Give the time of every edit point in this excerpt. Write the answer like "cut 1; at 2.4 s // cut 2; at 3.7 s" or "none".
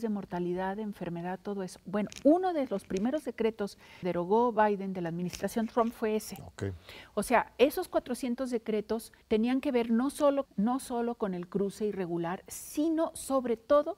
cut 1; at 4.0 s // cut 2; at 9.2 s // cut 3; at 10.5 s